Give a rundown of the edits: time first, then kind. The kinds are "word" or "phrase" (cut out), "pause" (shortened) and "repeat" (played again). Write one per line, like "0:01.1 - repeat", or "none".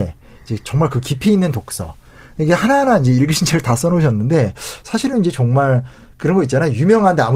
none